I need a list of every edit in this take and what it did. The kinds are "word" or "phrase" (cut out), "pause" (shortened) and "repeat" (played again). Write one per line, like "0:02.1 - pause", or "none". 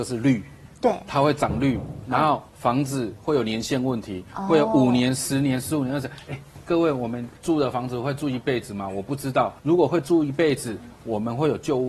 0:02.5 - pause
0:07.4 - pause
0:09.6 - pause